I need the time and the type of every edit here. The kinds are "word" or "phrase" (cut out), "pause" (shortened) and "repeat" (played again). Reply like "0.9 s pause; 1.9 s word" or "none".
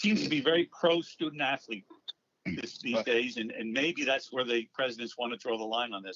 none